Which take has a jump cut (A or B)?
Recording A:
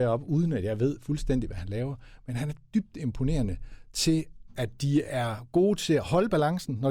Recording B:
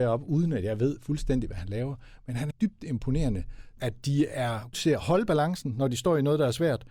B